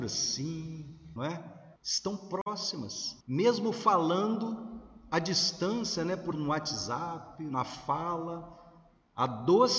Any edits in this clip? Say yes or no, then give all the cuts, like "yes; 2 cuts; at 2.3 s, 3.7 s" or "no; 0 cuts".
yes; 4 cuts; at 1.2 s, 1.8 s, 3.2 s, 6.3 s